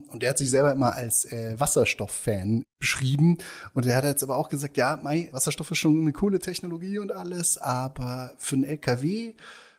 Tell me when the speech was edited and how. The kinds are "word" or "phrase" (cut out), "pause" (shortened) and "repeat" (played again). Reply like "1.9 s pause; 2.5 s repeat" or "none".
none

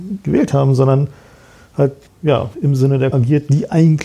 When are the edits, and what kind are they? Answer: 2.1 s word; 2.5 s word; 3.1 s word

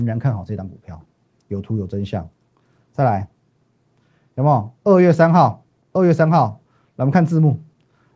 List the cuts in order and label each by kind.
none

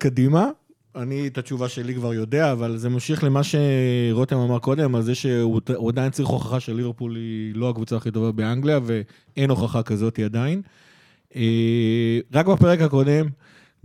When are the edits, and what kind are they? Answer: none

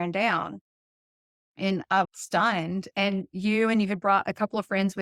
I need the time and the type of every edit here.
2.0 s phrase

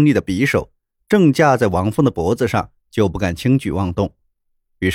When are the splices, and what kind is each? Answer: 2.8 s pause

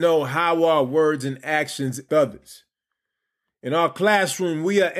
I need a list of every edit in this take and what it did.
2.1 s word

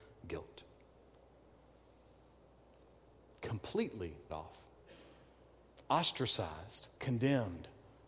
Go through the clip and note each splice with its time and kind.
4.3 s word; 7.0 s word

